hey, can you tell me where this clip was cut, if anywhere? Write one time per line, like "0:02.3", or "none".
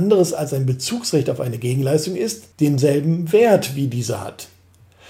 0:02.5